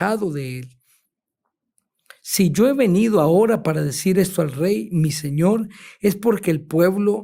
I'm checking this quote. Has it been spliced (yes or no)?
no